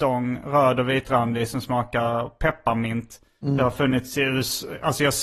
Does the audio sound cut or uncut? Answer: uncut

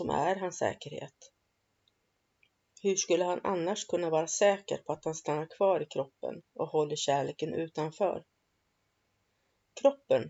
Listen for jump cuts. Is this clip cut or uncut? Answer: uncut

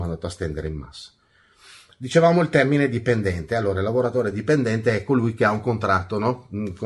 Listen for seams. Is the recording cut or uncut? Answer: uncut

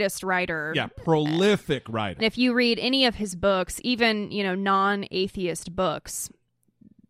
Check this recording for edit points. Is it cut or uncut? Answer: cut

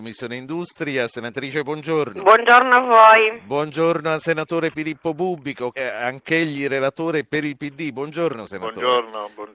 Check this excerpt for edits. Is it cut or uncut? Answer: cut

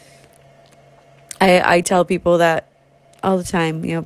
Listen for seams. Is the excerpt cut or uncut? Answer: uncut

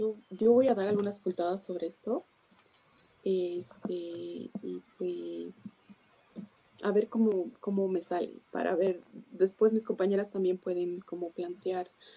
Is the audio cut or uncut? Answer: cut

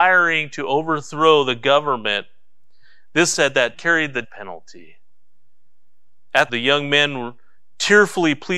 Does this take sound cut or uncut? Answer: cut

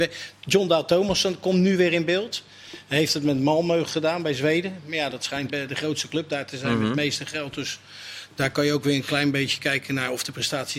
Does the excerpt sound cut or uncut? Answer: cut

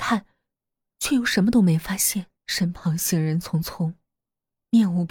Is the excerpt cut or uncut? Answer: cut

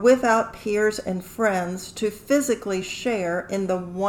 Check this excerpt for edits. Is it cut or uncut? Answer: uncut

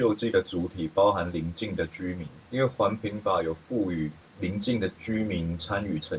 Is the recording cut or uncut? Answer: cut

